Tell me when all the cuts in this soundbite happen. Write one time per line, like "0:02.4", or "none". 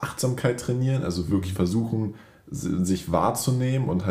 none